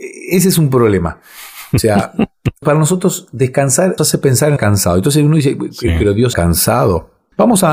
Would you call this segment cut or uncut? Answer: cut